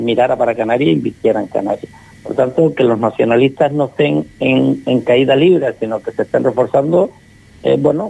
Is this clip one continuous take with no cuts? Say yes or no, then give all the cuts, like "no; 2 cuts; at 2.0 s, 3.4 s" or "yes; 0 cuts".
yes; 0 cuts